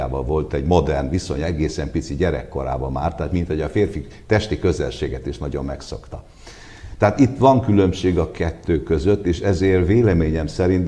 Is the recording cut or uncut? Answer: uncut